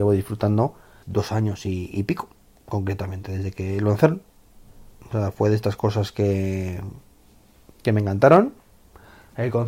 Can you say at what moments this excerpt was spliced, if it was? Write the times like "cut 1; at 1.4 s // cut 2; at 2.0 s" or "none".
cut 1; at 1.0 s